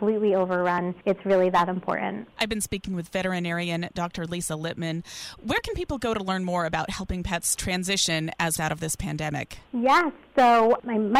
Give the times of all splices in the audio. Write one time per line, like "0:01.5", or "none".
0:01.0
0:08.6